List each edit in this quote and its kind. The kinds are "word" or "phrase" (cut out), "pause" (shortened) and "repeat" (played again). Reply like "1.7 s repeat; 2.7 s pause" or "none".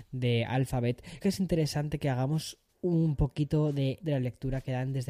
1.2 s word; 4.0 s word